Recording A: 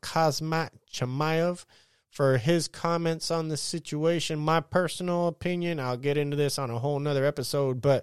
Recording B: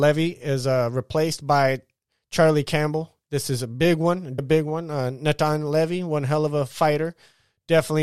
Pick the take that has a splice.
B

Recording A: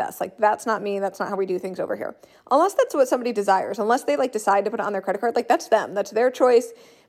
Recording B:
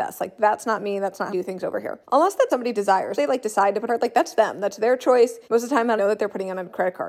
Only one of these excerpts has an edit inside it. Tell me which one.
B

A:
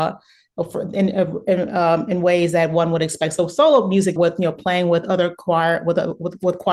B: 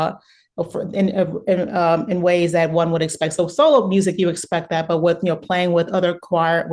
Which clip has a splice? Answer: A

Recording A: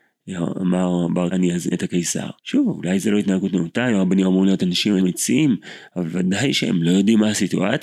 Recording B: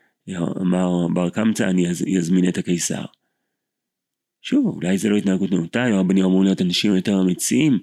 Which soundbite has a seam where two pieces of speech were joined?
A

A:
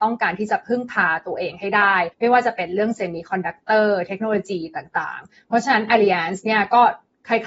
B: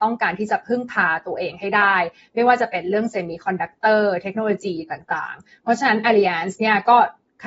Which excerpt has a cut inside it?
A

